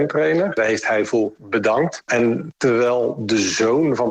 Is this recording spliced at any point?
no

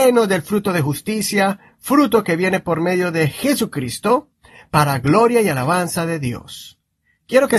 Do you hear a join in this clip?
no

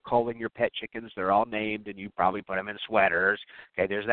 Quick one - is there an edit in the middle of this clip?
no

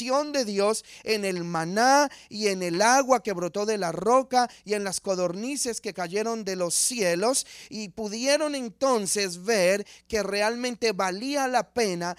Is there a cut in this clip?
no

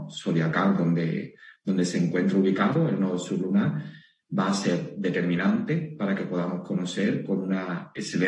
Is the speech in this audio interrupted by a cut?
no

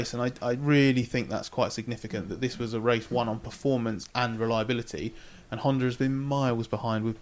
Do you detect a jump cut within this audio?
no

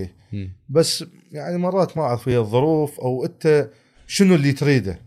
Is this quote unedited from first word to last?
yes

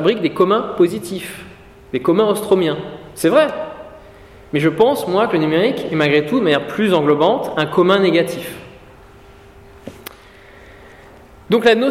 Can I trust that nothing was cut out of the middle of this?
yes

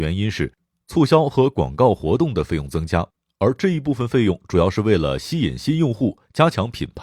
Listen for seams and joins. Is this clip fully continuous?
yes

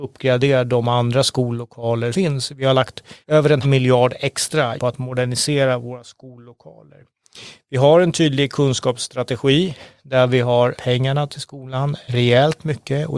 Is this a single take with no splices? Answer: no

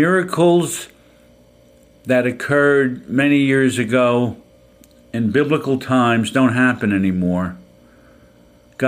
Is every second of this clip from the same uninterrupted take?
yes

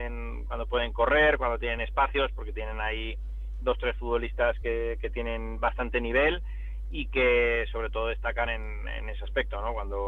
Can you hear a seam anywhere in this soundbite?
no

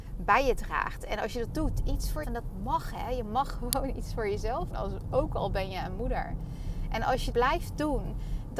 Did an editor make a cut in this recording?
yes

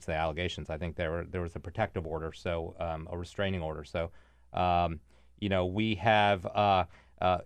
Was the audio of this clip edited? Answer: no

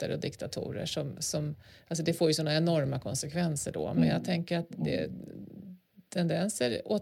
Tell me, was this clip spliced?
no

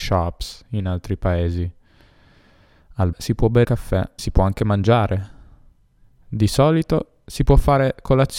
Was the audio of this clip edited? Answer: yes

